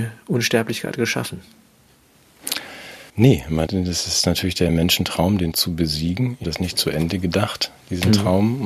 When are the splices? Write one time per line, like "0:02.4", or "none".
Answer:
0:03.1
0:03.7
0:04.7
0:05.5
0:06.4